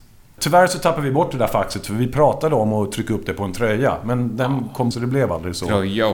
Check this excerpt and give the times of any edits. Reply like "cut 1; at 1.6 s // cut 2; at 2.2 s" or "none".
cut 1; at 4.9 s